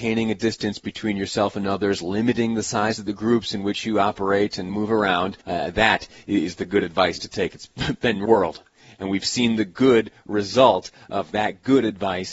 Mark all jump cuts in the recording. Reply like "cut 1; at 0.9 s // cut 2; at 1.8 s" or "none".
cut 1; at 4.7 s // cut 2; at 5.4 s // cut 3; at 8.3 s